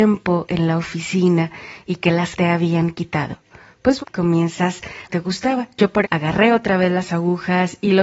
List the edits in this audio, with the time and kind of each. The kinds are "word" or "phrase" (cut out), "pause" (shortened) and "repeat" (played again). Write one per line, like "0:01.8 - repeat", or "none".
0:02.4 - word
0:04.0 - word
0:05.1 - phrase
0:06.0 - word